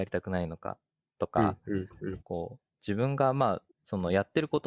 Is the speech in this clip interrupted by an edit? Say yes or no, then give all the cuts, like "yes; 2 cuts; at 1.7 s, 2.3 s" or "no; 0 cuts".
yes; 2 cuts; at 2.2 s, 3.7 s